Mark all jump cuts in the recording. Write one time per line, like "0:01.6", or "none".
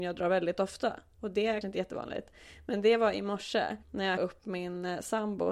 0:01.6
0:03.8
0:04.2

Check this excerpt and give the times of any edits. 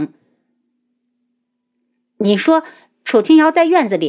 none

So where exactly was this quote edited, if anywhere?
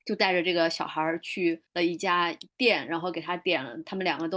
0:01.7

